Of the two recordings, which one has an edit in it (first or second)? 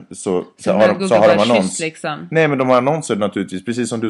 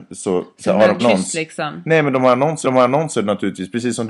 second